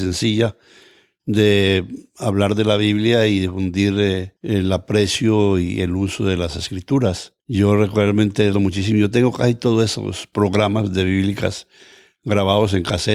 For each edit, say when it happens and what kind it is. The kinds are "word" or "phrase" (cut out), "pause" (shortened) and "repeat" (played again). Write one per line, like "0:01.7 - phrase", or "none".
0:04.4 - pause
0:07.4 - pause
0:08.5 - word